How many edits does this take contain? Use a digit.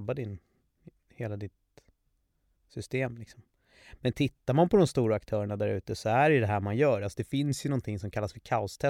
0